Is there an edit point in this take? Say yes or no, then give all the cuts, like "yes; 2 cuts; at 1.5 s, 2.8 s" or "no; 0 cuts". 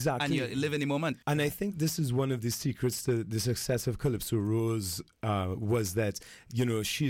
yes; 1 cut; at 1.2 s